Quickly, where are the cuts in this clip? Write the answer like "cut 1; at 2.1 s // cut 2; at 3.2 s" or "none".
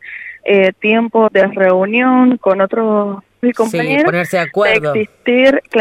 cut 1; at 1.3 s // cut 2; at 3.4 s